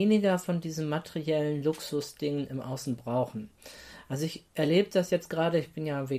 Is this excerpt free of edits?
yes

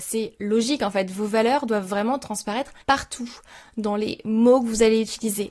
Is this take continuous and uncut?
no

